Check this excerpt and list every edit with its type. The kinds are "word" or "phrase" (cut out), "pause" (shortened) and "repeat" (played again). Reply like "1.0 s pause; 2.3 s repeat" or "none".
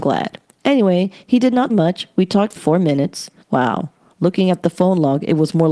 1.7 s word; 2.6 s word; 3.4 s pause

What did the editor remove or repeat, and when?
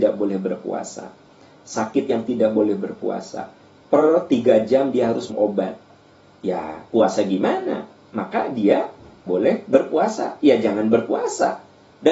2.1 s word; 5.3 s word; 9.3 s word

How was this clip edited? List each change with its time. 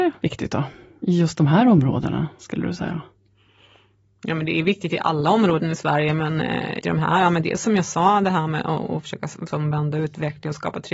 6.8 s word

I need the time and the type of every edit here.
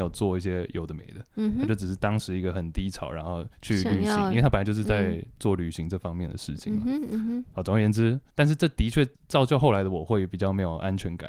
3.5 s pause; 8.3 s pause; 9.1 s pause

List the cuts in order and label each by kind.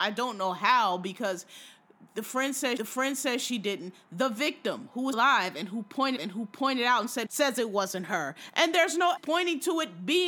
2.8 s repeat; 5.1 s word; 6.2 s repeat; 7.3 s phrase; 9.2 s word

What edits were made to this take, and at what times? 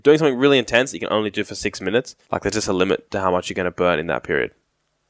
2.2 s pause

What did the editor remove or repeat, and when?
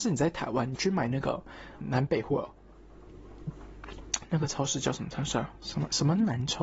1.8 s word

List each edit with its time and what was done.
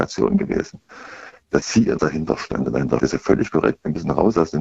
1.6 s word; 2.0 s word; 3.0 s word

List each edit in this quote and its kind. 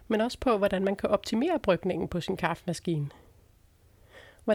none

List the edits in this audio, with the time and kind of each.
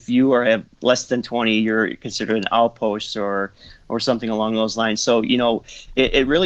none

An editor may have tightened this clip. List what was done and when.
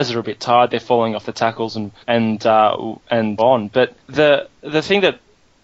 2.0 s pause; 3.4 s word; 4.0 s pause

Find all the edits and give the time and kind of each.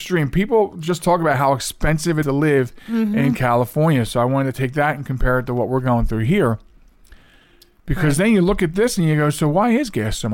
2.2 s word

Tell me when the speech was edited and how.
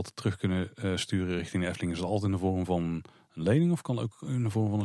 none

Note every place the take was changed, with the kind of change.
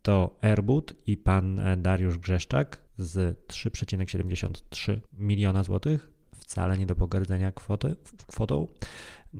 2.9 s pause; 5.1 s pause; 6.2 s word

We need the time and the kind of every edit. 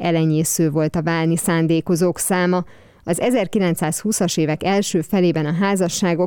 none

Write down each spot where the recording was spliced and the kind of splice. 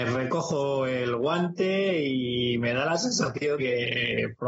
3.6 s word

